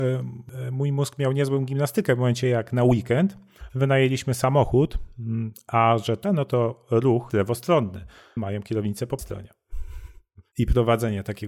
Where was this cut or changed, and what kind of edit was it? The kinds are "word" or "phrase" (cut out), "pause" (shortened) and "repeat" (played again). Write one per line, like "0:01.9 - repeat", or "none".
0:06.2 - phrase
0:07.3 - word
0:08.4 - phrase
0:09.2 - word